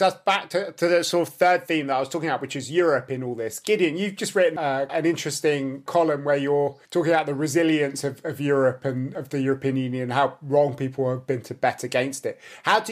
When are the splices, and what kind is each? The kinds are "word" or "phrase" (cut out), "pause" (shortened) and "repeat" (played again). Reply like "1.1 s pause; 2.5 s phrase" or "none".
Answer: 4.9 s word; 6.9 s pause